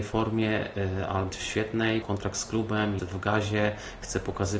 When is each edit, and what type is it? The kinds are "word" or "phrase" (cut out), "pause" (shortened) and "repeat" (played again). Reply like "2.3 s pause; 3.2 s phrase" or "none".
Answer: 1.3 s word; 2.0 s word; 3.0 s word